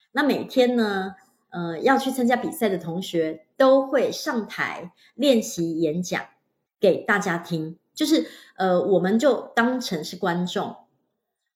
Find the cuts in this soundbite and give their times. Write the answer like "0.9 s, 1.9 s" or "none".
none